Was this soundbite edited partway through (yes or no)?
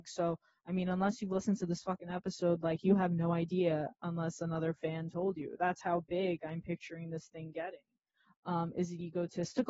no